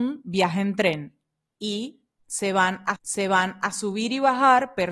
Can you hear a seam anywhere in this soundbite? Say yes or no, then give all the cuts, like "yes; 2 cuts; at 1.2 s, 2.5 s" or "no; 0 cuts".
yes; 1 cut; at 3.0 s